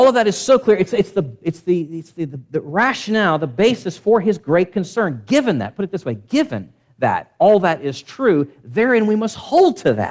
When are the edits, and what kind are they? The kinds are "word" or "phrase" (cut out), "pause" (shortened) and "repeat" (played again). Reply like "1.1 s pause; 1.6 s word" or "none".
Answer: none